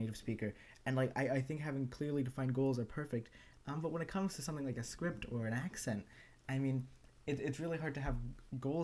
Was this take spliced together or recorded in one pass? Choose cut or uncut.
uncut